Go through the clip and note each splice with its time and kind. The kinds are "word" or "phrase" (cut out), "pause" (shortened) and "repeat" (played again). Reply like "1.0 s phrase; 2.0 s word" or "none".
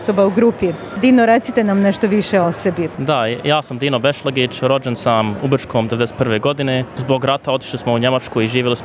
none